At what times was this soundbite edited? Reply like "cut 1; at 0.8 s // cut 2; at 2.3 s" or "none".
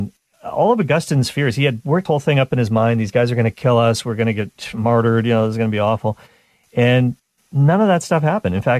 cut 1; at 2.1 s